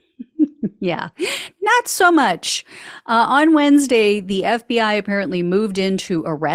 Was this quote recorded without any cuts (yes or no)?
yes